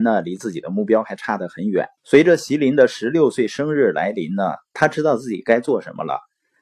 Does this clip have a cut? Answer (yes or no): yes